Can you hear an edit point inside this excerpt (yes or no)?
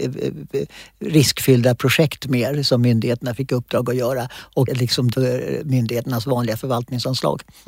yes